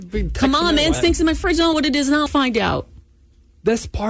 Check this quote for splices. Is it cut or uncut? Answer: cut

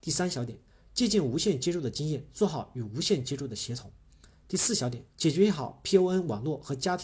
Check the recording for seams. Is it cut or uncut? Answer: cut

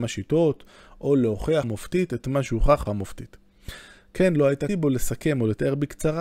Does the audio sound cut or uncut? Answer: cut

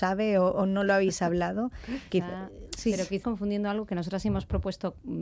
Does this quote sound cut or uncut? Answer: cut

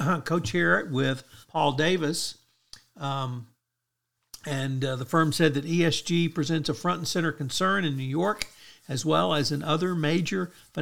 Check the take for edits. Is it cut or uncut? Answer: cut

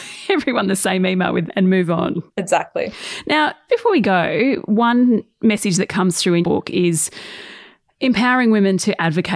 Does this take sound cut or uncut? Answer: cut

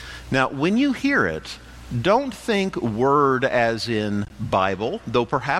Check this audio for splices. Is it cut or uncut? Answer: uncut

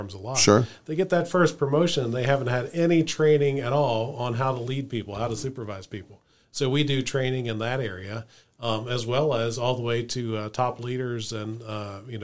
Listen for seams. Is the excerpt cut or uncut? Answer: uncut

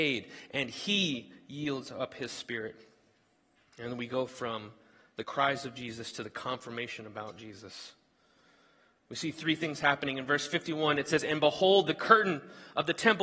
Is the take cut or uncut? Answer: uncut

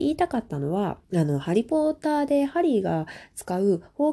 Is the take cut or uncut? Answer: cut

